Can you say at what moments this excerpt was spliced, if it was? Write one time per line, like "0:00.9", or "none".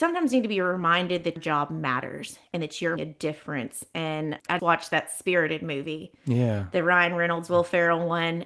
0:01.4
0:03.0
0:04.6